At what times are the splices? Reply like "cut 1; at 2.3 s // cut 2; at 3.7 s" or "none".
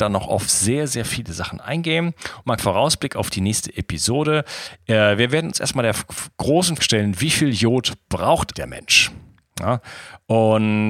cut 1; at 2.6 s // cut 2; at 6.8 s // cut 3; at 8.5 s